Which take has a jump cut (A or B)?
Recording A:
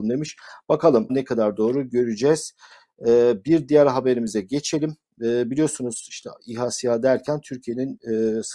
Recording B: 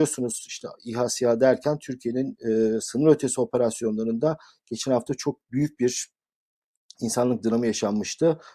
A